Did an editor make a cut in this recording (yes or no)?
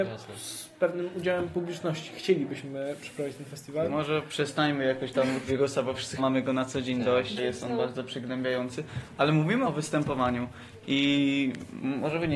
yes